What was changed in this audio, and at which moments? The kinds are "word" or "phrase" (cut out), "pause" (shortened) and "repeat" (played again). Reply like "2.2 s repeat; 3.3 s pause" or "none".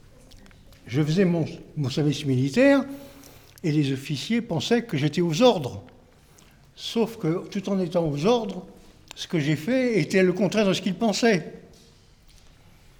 none

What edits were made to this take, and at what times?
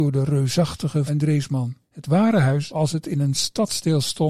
1.1 s word; 1.8 s pause; 2.7 s word

